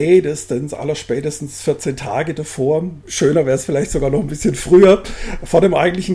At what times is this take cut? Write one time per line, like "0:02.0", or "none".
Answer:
none